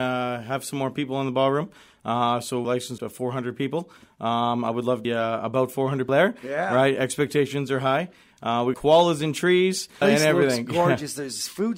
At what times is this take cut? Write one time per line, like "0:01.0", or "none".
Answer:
0:02.6
0:03.0
0:05.0
0:06.1
0:08.7
0:10.0